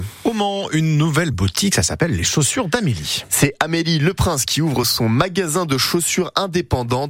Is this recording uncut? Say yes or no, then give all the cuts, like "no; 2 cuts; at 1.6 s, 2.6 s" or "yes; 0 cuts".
yes; 0 cuts